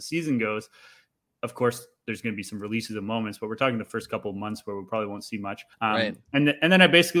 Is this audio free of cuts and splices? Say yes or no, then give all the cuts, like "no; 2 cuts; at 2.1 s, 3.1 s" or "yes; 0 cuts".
no; 1 cut; at 5.7 s